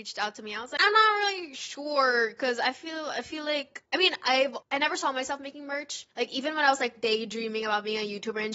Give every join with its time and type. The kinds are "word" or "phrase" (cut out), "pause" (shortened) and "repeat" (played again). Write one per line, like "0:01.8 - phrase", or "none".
0:03.9 - pause
0:06.1 - pause